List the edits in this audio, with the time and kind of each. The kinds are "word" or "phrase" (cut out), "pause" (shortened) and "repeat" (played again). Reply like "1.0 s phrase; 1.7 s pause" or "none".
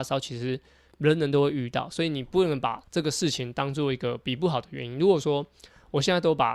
2.9 s pause